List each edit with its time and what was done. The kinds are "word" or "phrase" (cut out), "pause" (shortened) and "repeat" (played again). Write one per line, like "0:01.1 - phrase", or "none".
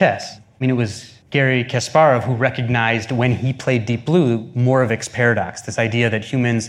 0:01.2 - pause